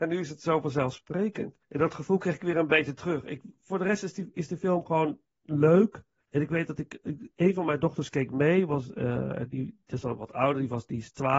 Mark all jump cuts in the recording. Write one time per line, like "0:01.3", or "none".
0:01.6
0:06.2